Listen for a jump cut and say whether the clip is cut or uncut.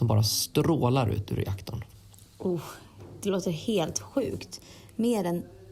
uncut